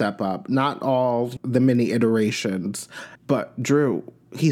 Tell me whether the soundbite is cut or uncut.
cut